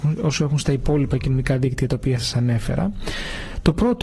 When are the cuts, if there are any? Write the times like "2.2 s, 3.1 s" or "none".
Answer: none